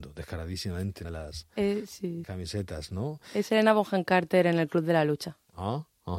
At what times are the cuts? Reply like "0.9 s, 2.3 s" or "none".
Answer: 1.0 s, 2.2 s